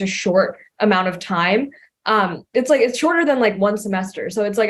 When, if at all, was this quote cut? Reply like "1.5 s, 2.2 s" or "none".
none